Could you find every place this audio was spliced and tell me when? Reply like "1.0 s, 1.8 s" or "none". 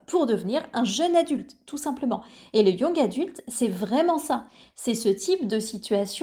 none